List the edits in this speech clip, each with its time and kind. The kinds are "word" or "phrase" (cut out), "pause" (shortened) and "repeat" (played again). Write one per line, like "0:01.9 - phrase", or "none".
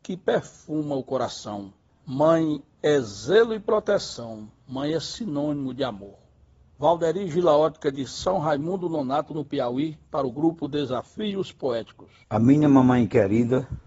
0:01.9 - pause
0:06.6 - pause
0:12.2 - pause